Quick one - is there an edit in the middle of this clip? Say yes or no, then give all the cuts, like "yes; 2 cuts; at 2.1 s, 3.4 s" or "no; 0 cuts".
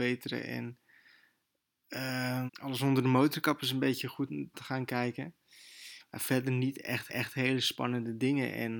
yes; 3 cuts; at 2.5 s, 4.5 s, 7.1 s